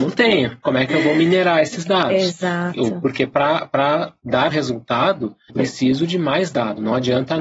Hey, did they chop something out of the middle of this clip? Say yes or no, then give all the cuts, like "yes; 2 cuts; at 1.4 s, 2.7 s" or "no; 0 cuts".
yes; 2 cuts; at 4.5 s, 5.5 s